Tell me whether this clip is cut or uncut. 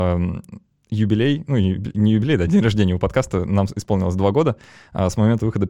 uncut